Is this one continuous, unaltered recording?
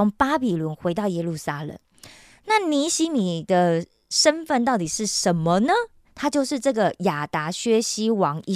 yes; 0 cuts

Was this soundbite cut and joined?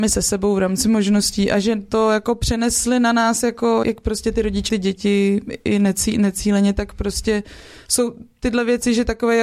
yes; 2 cuts; at 3.8 s, 4.7 s

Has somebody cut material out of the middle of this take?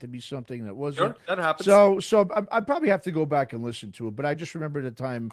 no; 0 cuts

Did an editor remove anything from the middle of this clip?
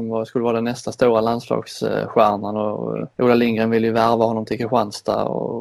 yes; 1 cut; at 3.1 s

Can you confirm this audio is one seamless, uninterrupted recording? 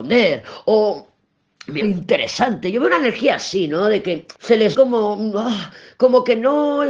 no; 3 cuts; at 1.8 s, 4.4 s, 4.7 s

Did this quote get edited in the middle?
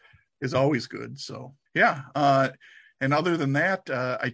yes; 1 cut; at 1.7 s

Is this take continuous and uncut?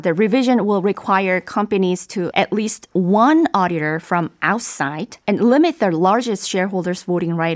no; 2 cuts; at 2.3 s, 5.2 s

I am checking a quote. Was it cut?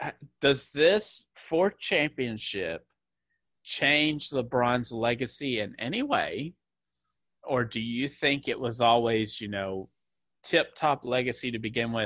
no; 0 cuts

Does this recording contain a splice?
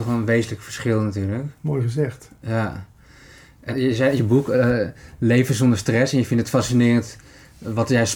yes; 2 cuts; at 3.7 s, 4.2 s

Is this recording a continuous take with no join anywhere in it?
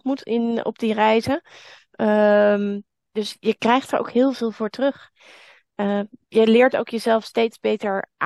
yes; 0 cuts

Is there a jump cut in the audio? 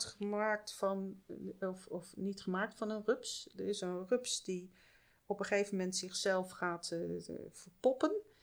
no; 0 cuts

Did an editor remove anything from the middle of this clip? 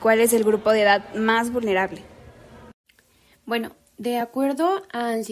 no; 0 cuts

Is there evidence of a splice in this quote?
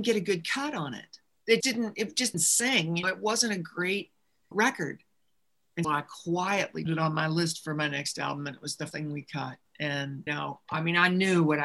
yes; 8 cuts; at 1.6 s, 2.3 s, 3.0 s, 4.5 s, 5.8 s, 6.9 s, 8.9 s, 10.3 s

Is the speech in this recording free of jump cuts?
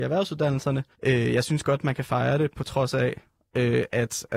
no; 1 cut; at 0.9 s

